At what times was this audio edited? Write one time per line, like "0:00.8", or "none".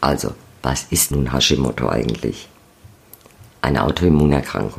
0:01.1
0:03.5